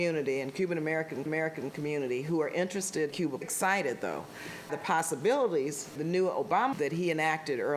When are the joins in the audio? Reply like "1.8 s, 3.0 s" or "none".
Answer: 1.3 s, 3.1 s, 3.4 s, 4.7 s, 6.0 s, 6.7 s